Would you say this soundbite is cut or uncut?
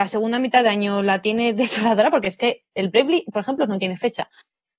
uncut